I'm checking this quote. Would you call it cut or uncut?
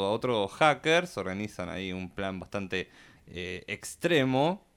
uncut